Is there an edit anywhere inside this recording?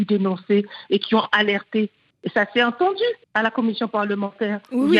yes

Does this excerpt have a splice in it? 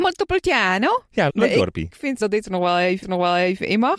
yes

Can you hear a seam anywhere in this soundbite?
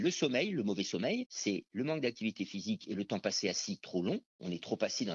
no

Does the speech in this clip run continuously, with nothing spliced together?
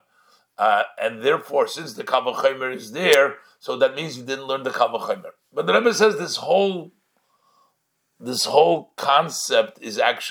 yes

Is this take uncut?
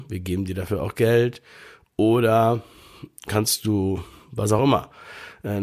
yes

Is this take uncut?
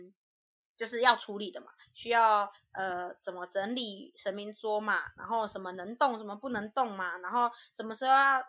yes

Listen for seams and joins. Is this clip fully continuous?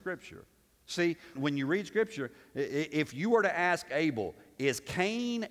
no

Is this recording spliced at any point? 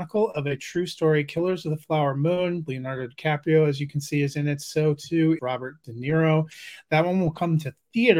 yes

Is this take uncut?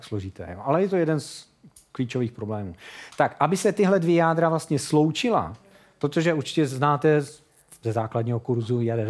yes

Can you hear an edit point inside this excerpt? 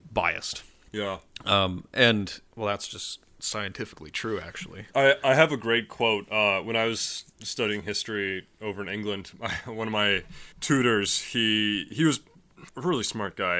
yes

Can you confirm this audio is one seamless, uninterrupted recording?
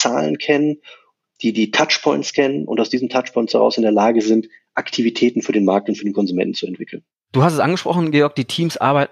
yes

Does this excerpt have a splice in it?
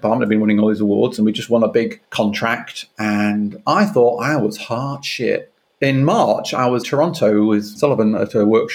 yes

